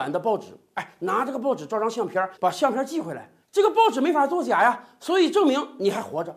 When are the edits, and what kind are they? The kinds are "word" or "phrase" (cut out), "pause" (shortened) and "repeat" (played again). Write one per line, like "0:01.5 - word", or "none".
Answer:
0:02.3 - pause
0:03.4 - pause